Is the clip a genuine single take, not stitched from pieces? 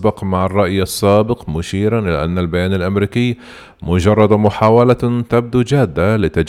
yes; 0 cuts

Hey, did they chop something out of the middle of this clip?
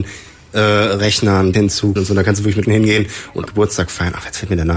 yes; 4 cuts; at 1.5 s, 2.0 s, 2.6 s, 3.5 s

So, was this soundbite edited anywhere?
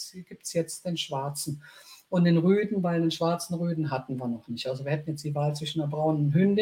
no; 0 cuts

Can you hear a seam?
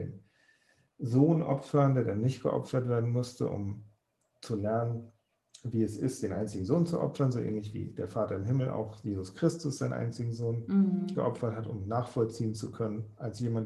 no; 0 cuts

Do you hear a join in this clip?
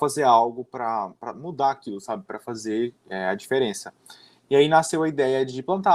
no; 0 cuts

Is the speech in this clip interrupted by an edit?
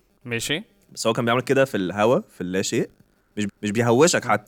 yes; 1 cut; at 3.5 s

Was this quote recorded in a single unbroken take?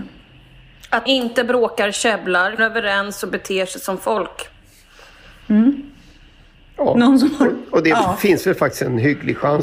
no; 2 cuts; at 1.1 s, 2.6 s

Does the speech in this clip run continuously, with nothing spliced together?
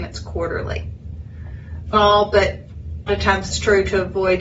no; 3 cuts; at 1.9 s, 3.1 s, 3.5 s

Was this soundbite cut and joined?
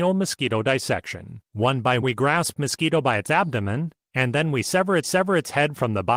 yes; 5 cuts; at 1.5 s, 2.0 s, 2.6 s, 4.0 s, 5.0 s

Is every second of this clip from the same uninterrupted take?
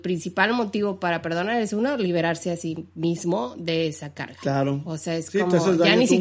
yes; 0 cuts

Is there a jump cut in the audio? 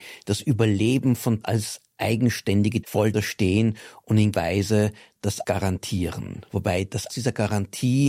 yes; 6 cuts; at 1.4 s, 2.8 s, 3.1 s, 4.3 s, 5.4 s, 7.1 s

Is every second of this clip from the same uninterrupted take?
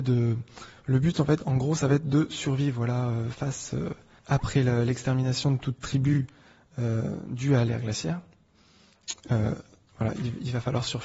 no; 1 cut; at 4.2 s

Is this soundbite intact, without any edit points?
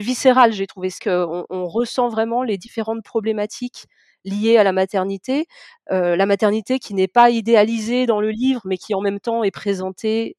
no; 1 cut; at 1.0 s

